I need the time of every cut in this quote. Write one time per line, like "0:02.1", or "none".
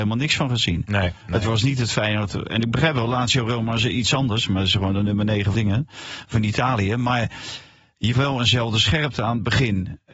0:05.5
0:08.1

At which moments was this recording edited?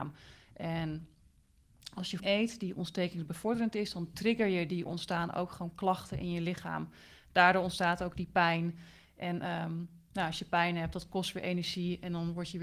0:02.2
0:04.9

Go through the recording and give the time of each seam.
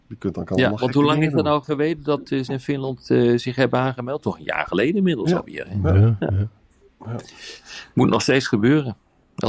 0:01.6
0:02.5

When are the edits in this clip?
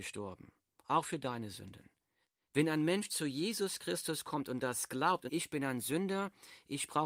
0:02.2
0:05.3

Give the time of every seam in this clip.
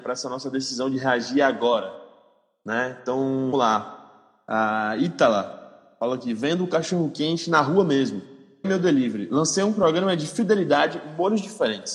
0:03.5
0:08.6

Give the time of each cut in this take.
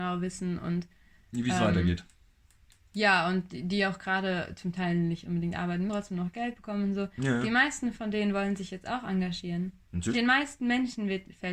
0:05.9
0:10.1

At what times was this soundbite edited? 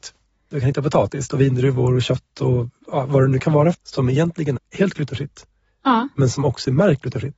0:01.3
0:03.7
0:04.6

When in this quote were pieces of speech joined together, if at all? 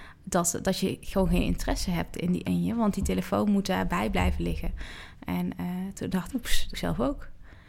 0:02.4
0:06.3
0:06.7

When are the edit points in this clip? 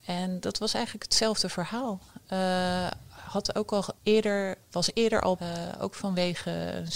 0:04.0
0:05.4

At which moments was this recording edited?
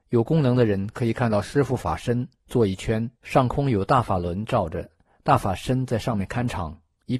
0:03.2

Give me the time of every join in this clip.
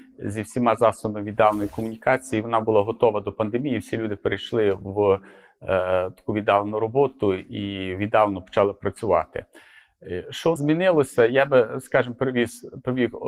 0:10.6

